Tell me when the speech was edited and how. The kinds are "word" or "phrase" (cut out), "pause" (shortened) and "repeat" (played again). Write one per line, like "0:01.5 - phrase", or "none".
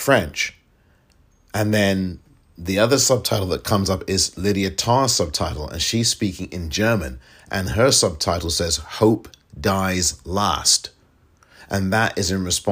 none